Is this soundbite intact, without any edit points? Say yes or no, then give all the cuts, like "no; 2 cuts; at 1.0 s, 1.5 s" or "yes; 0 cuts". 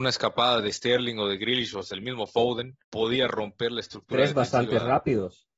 no; 1 cut; at 2.8 s